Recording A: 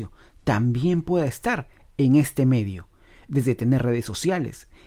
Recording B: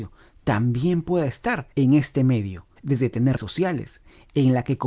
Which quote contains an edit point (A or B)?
B